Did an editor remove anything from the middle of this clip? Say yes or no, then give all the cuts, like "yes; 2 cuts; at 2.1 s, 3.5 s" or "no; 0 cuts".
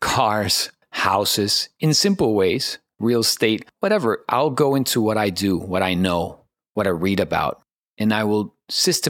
no; 0 cuts